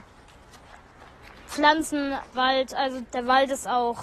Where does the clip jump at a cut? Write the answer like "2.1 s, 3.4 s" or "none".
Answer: 2.3 s, 3.0 s